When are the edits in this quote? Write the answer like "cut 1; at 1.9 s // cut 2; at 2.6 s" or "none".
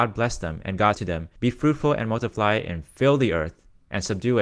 cut 1; at 0.9 s // cut 2; at 1.4 s